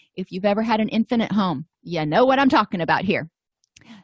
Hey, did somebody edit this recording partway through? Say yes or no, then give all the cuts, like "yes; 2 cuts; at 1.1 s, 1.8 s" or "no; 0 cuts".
yes; 1 cut; at 1.7 s